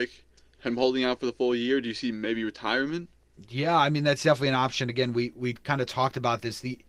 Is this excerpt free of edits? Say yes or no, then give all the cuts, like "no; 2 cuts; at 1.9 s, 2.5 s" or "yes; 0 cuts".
yes; 0 cuts